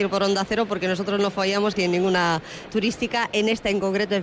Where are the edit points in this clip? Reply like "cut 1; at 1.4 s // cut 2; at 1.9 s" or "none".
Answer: cut 1; at 1.8 s // cut 2; at 2.7 s